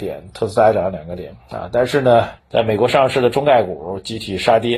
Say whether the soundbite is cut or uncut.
cut